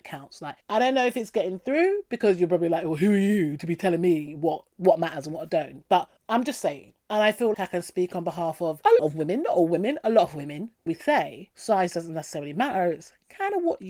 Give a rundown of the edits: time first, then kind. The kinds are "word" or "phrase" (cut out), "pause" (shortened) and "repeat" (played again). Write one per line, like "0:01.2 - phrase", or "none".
0:07.5 - word
0:09.0 - word
0:10.9 - word